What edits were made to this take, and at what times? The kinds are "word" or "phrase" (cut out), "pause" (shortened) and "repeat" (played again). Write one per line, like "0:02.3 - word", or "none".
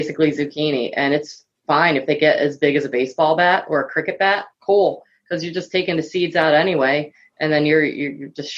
0:04.5 - pause